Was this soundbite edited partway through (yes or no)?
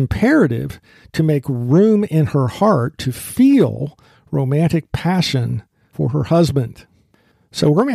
no